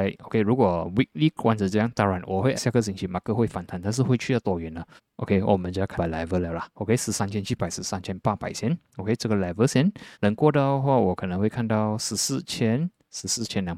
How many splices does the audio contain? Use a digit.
4